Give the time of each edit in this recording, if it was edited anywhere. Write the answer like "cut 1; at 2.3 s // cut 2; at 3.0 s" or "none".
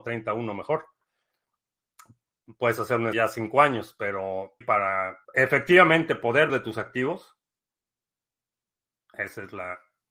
cut 1; at 3.1 s // cut 2; at 4.6 s // cut 3; at 5.2 s // cut 4; at 6.5 s